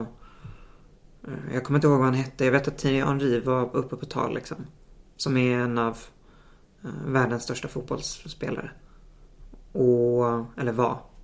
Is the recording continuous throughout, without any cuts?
yes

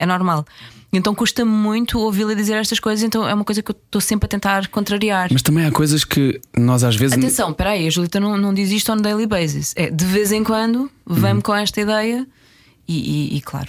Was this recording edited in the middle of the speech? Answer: no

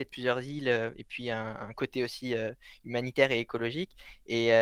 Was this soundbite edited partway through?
yes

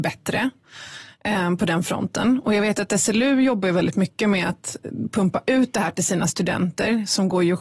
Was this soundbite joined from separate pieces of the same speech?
no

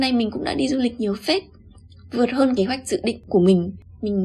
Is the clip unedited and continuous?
no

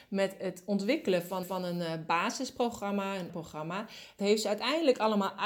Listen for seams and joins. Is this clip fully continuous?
no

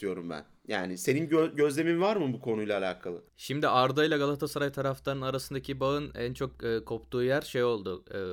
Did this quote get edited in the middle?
yes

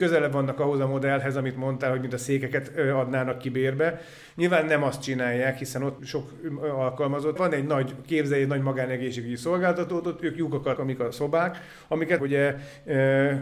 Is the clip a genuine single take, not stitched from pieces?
no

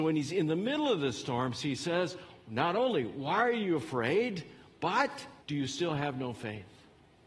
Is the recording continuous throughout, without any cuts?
no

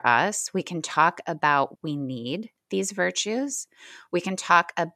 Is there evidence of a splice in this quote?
yes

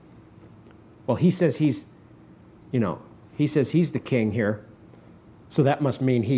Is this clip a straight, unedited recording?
yes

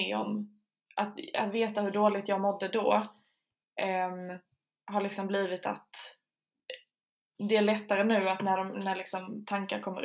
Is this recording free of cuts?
yes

